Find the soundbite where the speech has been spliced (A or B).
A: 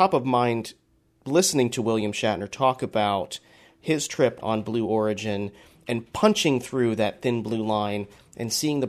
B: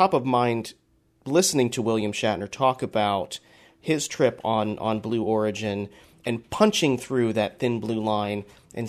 A